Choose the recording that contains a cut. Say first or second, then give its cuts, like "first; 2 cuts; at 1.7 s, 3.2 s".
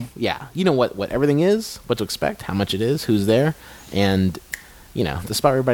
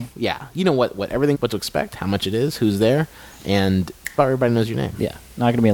second; 2 cuts; at 1.3 s, 4.2 s